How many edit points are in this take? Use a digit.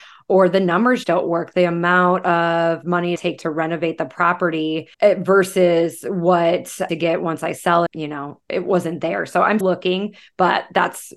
6